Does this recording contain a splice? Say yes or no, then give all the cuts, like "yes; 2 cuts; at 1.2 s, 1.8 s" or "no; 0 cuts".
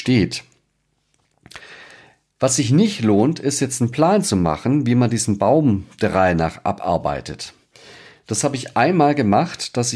no; 0 cuts